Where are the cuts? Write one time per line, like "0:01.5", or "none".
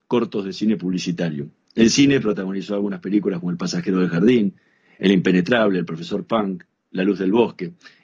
none